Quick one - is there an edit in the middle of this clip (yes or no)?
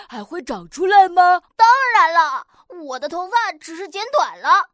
yes